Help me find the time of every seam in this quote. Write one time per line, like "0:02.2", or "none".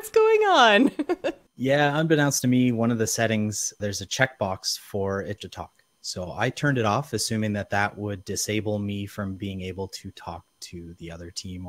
0:01.5
0:03.8
0:05.4